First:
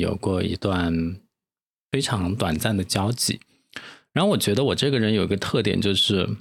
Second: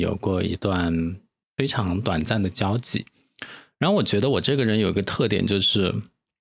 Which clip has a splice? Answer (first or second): second